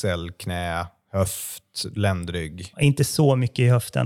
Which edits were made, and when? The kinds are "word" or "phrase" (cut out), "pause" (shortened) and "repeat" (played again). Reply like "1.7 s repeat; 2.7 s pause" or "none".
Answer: 2.7 s pause